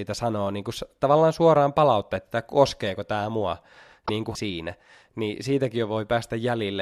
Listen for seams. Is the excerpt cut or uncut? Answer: cut